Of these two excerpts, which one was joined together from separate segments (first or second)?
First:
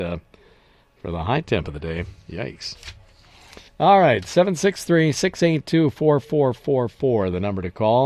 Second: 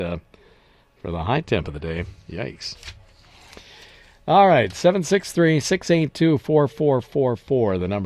first